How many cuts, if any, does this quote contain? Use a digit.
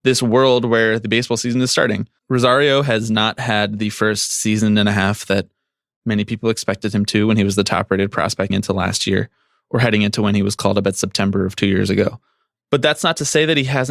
2